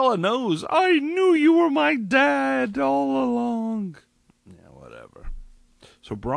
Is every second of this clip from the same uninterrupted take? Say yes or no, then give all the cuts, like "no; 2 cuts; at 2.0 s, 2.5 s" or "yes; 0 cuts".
yes; 0 cuts